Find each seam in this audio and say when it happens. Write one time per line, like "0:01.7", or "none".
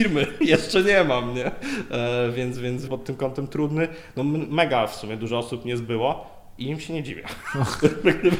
0:02.9